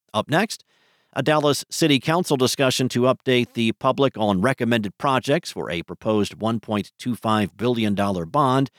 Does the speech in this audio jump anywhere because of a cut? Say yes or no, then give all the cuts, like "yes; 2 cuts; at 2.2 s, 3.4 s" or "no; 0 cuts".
no; 0 cuts